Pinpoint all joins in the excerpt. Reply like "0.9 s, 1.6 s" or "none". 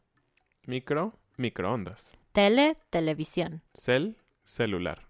2.2 s, 3.7 s

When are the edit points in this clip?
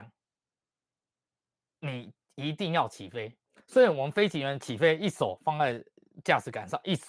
3.5 s

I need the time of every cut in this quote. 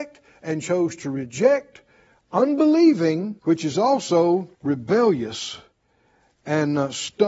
3.4 s, 4.5 s

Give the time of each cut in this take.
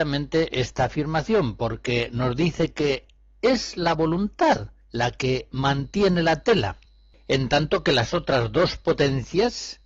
none

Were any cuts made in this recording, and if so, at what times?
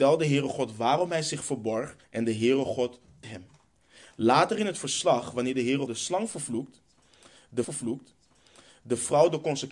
2.0 s, 3.2 s, 5.9 s, 7.6 s

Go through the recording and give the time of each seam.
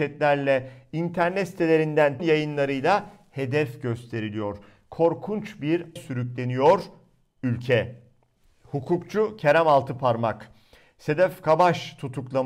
2.2 s, 6.0 s

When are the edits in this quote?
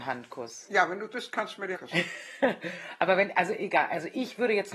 1.1 s, 1.7 s

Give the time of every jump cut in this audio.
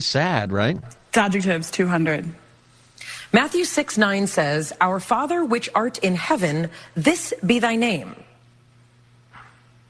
none

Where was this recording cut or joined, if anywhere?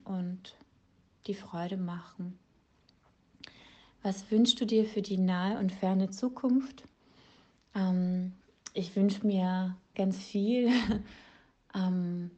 9.9 s

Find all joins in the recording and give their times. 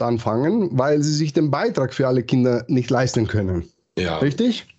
none

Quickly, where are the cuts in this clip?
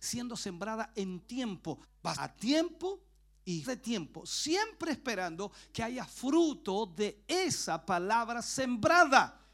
1.2 s, 1.8 s, 2.1 s, 3.6 s

